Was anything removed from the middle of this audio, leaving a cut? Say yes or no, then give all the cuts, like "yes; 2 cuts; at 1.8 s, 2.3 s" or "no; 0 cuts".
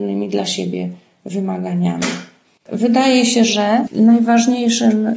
no; 0 cuts